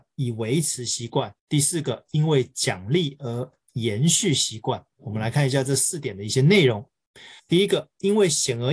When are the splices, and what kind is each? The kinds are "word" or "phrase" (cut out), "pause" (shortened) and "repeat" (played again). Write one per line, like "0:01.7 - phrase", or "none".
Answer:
0:01.4 - pause
0:04.9 - pause
0:07.4 - pause